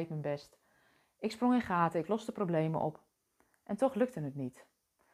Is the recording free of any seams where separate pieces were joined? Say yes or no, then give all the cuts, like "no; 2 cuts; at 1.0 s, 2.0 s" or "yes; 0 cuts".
yes; 0 cuts